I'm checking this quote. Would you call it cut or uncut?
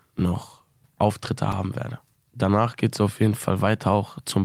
uncut